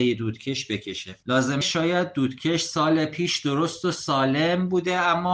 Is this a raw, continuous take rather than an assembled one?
no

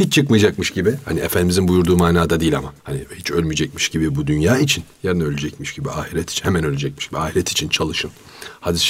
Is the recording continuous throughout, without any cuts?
no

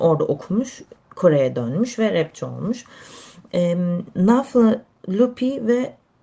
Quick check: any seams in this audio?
no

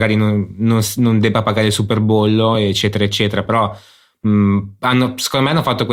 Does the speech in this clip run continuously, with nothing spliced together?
yes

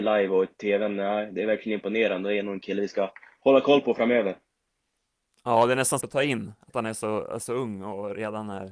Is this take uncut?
no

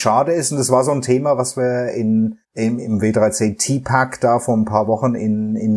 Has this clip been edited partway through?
yes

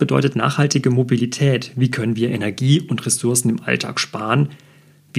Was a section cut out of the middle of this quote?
no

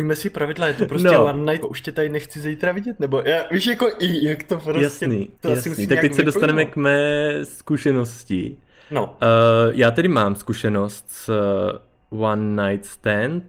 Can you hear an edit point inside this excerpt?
yes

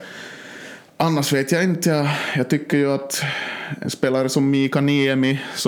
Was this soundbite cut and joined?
no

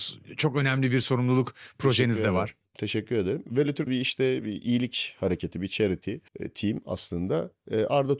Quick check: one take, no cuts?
no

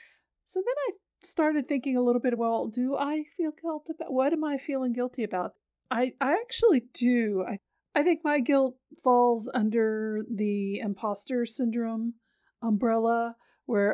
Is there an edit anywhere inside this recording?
no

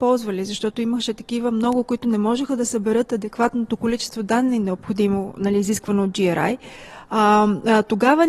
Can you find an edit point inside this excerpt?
no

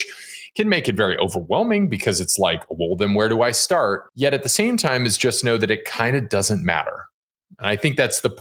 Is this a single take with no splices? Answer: no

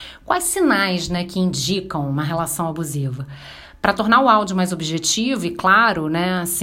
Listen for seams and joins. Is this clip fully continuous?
yes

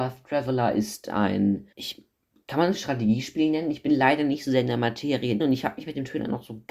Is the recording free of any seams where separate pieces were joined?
no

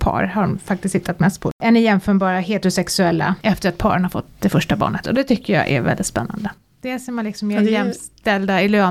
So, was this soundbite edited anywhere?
no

